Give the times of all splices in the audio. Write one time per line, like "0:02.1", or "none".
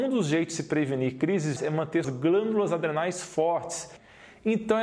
0:01.6
0:02.0

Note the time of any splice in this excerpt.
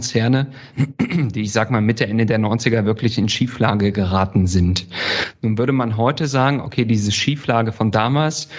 none

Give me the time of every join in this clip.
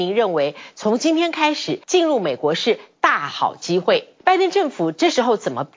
0:01.8
0:04.2

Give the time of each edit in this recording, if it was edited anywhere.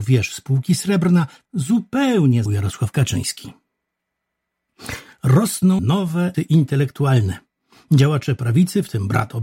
0:01.4
0:02.5
0:05.8
0:06.3

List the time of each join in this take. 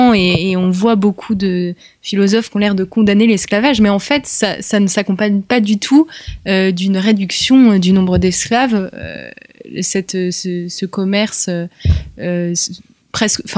none

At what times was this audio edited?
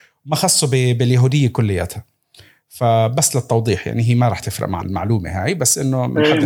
0:04.8

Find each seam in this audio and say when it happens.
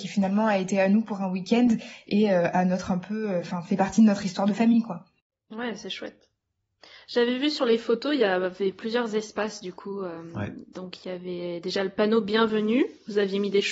none

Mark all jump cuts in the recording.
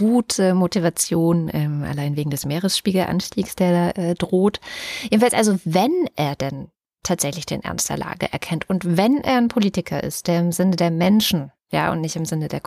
none

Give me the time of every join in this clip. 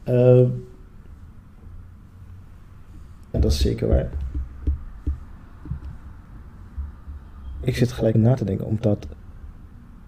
0:03.3
0:08.1

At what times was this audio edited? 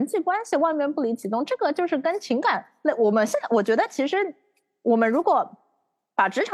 none

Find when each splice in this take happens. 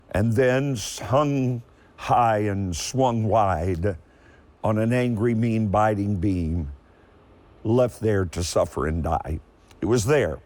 none

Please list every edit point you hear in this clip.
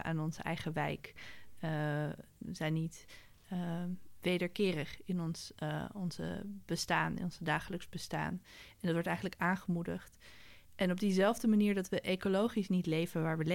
0:10.6

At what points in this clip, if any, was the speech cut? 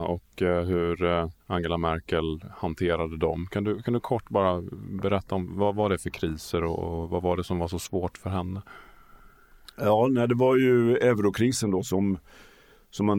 0:01.4

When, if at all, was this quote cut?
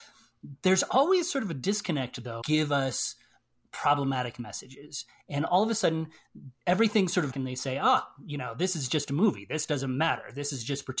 0:02.4
0:06.6
0:07.3

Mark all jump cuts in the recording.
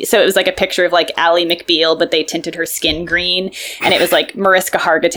none

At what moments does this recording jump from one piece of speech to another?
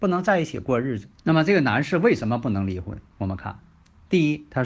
0:01.1

